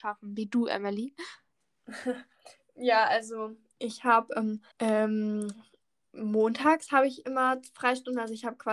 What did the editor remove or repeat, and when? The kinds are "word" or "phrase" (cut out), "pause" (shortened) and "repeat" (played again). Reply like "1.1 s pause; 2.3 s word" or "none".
4.7 s pause